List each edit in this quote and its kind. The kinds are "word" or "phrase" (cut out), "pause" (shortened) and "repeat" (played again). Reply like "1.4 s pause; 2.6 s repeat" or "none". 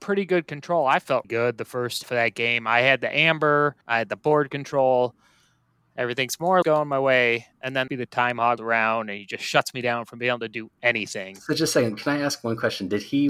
1.2 s word; 2.0 s word; 3.8 s pause; 6.6 s word; 7.9 s phrase; 8.6 s word